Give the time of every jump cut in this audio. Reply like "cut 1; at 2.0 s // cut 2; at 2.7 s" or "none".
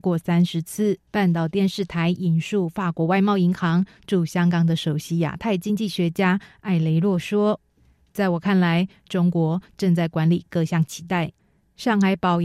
cut 1; at 1.1 s